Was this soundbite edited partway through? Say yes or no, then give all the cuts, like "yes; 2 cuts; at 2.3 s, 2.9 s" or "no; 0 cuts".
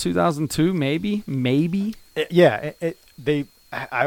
yes; 2 cuts; at 2.3 s, 3.1 s